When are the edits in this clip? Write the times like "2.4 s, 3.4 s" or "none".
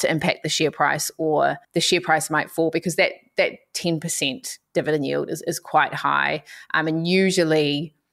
1.6 s